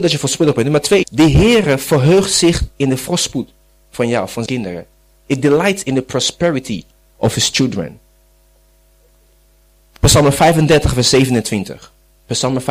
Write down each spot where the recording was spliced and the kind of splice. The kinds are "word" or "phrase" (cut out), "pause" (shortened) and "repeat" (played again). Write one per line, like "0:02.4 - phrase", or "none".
0:01.0 - word
0:04.5 - word